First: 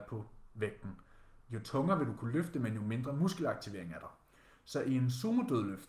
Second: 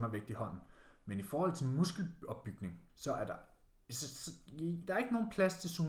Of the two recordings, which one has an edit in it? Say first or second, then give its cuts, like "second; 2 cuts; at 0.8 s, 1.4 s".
second; 1 cut; at 2.9 s